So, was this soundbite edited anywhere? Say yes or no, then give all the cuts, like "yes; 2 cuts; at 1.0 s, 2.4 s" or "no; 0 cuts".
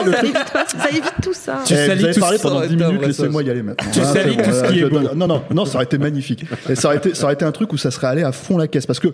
no; 0 cuts